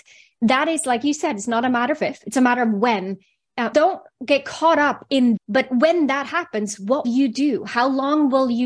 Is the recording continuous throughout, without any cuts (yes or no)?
no